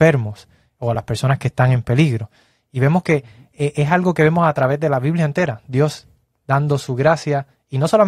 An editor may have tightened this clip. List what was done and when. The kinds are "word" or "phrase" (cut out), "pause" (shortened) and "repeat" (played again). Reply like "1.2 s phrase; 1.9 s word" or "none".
none